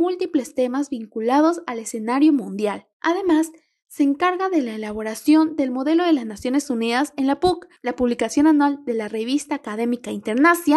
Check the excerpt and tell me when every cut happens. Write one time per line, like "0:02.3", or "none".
0:02.9
0:07.8